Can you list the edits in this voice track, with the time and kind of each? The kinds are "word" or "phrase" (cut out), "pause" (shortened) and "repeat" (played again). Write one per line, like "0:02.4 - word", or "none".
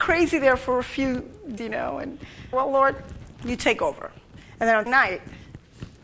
0:01.6 - word
0:02.5 - phrase
0:03.3 - pause
0:04.9 - word